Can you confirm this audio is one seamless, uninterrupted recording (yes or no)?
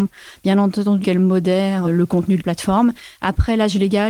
no